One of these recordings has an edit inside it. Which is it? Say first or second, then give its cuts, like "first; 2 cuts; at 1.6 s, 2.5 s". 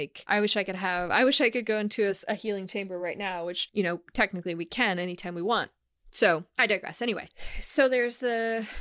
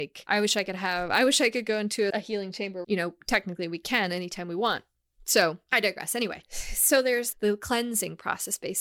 second; 3 cuts; at 2.1 s, 2.8 s, 7.3 s